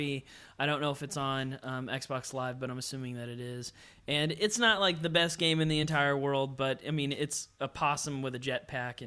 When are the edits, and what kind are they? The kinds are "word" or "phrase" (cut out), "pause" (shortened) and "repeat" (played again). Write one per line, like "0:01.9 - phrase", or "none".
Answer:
none